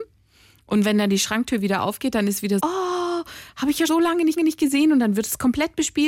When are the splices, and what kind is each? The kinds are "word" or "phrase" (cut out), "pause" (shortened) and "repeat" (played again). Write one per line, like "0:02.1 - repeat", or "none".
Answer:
0:02.6 - word
0:03.9 - word
0:04.4 - repeat

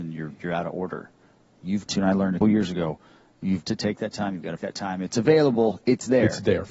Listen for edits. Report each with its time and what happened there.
0:01.9 - word
0:02.4 - word
0:03.6 - word
0:04.6 - word

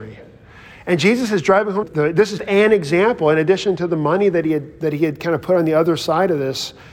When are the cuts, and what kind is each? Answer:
0:01.8 - word
0:02.4 - word

